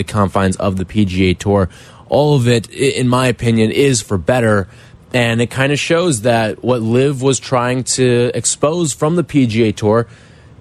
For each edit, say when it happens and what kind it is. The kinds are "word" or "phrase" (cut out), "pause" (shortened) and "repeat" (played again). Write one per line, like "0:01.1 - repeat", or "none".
none